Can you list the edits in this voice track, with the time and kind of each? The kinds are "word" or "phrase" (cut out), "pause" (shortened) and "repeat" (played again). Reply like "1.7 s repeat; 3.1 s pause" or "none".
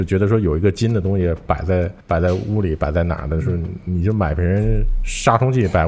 2.0 s pause